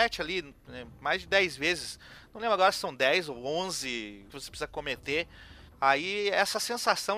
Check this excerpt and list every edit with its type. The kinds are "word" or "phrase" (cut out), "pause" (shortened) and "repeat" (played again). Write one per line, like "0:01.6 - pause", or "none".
0:04.3 - word
0:05.7 - pause